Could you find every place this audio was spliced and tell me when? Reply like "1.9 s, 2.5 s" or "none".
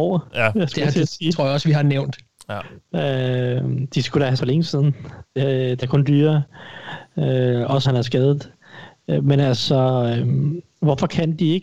4.4 s, 5.8 s, 7.8 s